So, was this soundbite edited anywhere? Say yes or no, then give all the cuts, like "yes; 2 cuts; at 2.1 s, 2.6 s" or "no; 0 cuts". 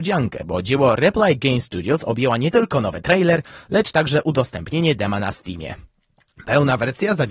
no; 0 cuts